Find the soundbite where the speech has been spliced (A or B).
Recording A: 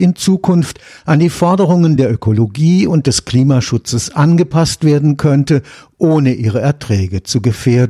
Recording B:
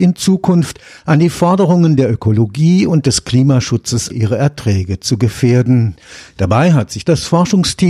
B